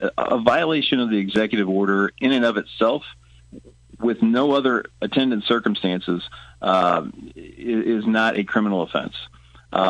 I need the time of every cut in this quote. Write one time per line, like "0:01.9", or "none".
none